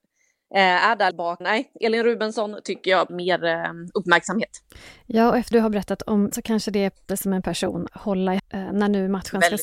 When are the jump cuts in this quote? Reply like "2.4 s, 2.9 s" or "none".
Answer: 1.1 s, 1.4 s, 3.1 s, 5.5 s, 6.3 s, 7.1 s, 7.4 s, 7.9 s, 8.4 s